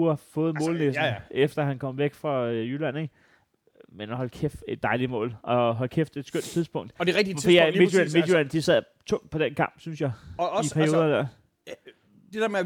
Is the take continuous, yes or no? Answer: yes